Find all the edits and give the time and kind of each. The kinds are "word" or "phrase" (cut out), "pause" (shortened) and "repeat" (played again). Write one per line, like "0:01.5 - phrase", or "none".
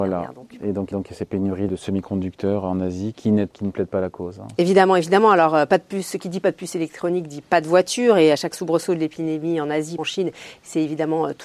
0:00.9 - repeat
0:01.7 - word
0:03.1 - word
0:03.5 - word
0:10.0 - word